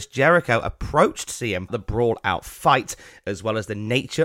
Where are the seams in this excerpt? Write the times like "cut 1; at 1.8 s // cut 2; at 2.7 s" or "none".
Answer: cut 1; at 1.7 s

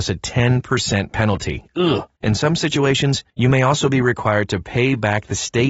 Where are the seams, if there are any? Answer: cut 1; at 2.2 s // cut 2; at 3.3 s

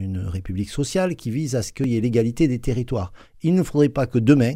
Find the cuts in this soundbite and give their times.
none

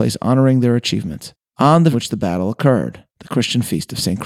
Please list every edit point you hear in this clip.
cut 1; at 1.9 s // cut 2; at 3.1 s

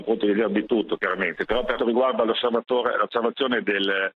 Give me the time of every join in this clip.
cut 1; at 1.8 s

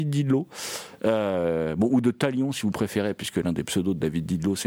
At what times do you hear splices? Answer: none

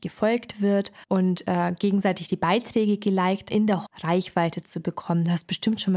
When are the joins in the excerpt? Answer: cut 1; at 1.0 s // cut 2; at 3.5 s // cut 3; at 3.9 s

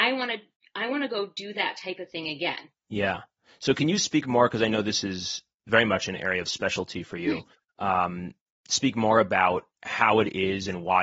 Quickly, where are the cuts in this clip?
cut 1; at 2.7 s // cut 2; at 8.4 s // cut 3; at 9.7 s

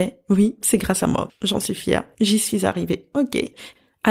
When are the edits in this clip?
none

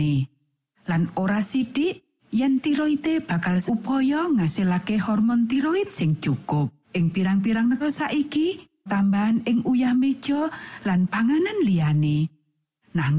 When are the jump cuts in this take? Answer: cut 1; at 3.7 s // cut 2; at 6.8 s // cut 3; at 7.8 s // cut 4; at 8.9 s

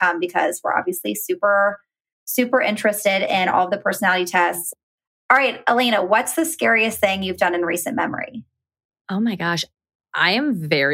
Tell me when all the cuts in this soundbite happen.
none

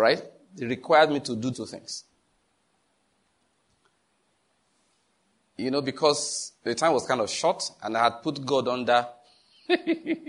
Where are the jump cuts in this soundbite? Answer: cut 1; at 1.5 s

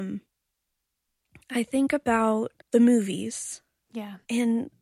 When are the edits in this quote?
cut 1; at 2.6 s

